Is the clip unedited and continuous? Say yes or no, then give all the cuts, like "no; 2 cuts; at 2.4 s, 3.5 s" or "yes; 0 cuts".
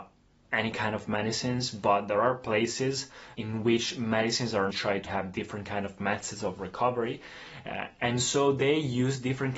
no; 3 cuts; at 3.3 s, 4.7 s, 5.1 s